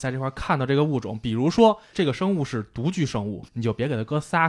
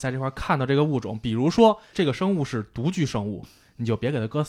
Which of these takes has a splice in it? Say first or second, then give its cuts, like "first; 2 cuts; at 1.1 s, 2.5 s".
first; 1 cut; at 3.5 s